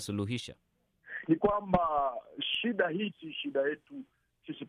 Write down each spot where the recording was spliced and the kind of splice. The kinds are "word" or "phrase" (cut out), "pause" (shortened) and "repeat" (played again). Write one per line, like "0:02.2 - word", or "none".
0:01.4 - word
0:03.1 - word

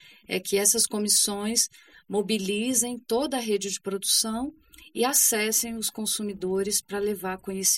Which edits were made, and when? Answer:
none

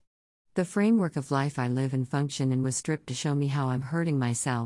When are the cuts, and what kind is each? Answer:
0:03.1 - word

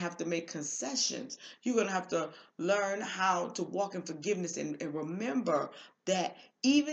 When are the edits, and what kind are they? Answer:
none

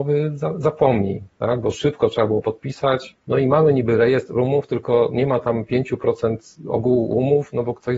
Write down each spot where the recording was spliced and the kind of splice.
0:03.2 - pause

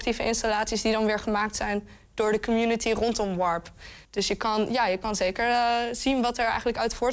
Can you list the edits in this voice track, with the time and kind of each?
0:04.0 - pause

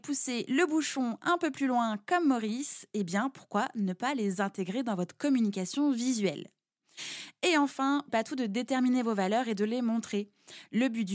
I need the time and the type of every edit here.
0:08.1 - phrase

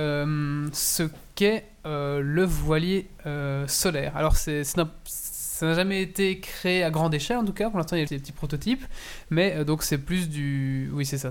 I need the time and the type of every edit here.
0:08.1 - word

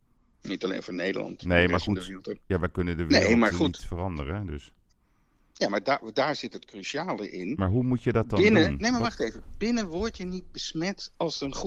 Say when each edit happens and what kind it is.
none

